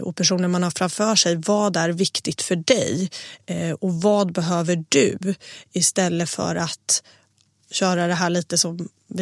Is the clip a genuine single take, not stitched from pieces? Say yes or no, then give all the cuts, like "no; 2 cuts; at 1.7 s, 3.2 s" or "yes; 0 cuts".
yes; 0 cuts